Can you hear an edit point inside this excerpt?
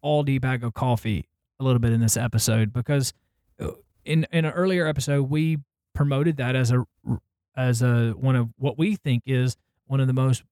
no; 0 cuts

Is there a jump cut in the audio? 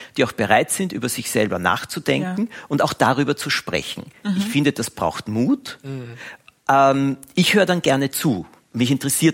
no; 0 cuts

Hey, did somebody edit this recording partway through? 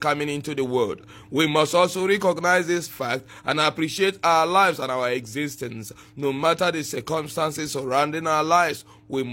no; 0 cuts

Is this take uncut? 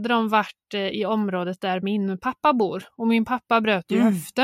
yes; 0 cuts

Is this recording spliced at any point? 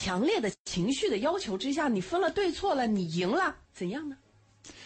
yes; 1 cut; at 3.6 s

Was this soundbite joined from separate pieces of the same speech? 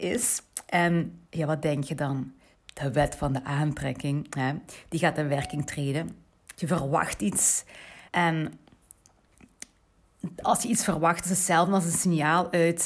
yes; 3 cuts; at 1.2 s, 2.5 s, 8.1 s

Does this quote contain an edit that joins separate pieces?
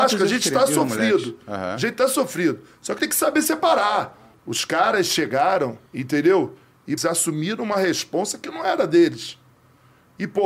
yes; 4 cuts; at 3.0 s, 4.3 s, 5.9 s, 7.0 s

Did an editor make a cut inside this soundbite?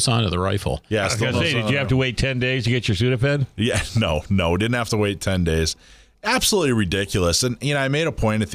no; 0 cuts

